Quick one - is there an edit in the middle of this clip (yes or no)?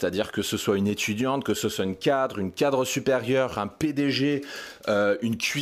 no